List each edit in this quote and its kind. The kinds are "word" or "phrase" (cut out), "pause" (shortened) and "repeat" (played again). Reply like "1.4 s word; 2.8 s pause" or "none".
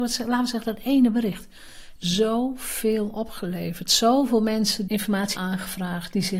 2.0 s word; 4.9 s word; 5.4 s word